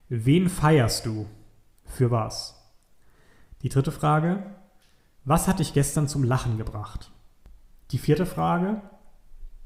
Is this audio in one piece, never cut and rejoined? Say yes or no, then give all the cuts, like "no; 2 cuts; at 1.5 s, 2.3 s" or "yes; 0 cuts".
yes; 0 cuts